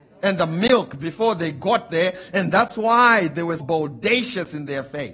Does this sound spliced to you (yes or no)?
yes